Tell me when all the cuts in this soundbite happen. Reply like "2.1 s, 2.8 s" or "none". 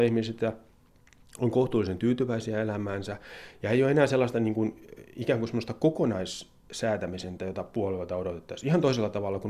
7.4 s